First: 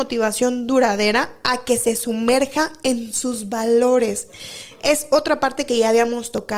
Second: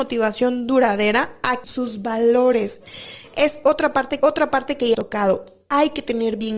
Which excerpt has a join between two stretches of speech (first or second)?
second